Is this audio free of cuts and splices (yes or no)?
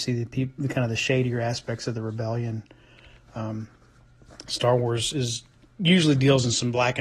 yes